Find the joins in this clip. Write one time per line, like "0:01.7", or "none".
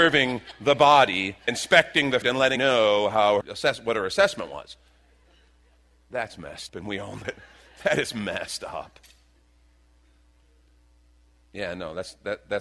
0:01.5
0:02.2
0:02.6
0:03.4
0:06.7
0:07.2